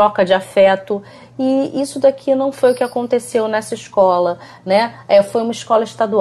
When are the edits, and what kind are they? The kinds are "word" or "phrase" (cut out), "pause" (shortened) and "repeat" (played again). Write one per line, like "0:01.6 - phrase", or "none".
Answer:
none